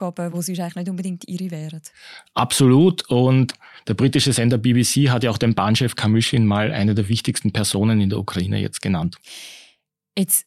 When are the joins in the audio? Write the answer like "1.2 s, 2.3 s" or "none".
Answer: none